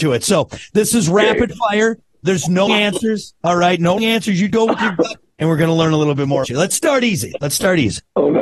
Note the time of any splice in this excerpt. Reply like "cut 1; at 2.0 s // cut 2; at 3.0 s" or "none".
cut 1; at 2.7 s // cut 2; at 4.0 s // cut 3; at 4.5 s // cut 4; at 6.4 s